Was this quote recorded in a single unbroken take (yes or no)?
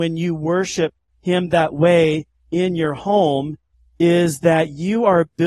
yes